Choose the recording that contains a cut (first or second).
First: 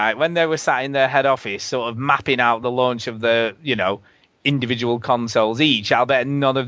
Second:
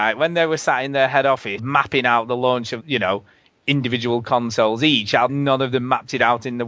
second